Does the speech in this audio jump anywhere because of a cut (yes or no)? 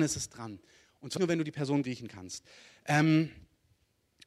yes